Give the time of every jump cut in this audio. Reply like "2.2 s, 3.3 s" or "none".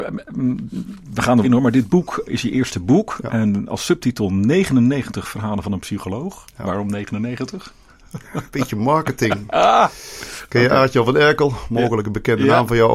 1.4 s, 2.3 s